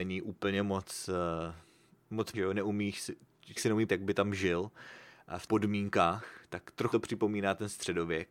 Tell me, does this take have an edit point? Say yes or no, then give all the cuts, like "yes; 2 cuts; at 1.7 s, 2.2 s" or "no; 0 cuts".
yes; 5 cuts; at 2.3 s, 3.6 s, 3.9 s, 5.5 s, 6.9 s